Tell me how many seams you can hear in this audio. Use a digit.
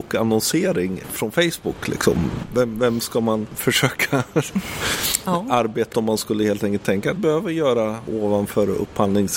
2